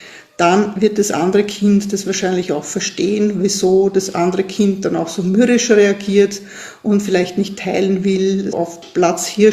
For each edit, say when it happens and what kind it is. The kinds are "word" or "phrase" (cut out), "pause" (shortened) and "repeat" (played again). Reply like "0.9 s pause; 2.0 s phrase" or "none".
8.5 s word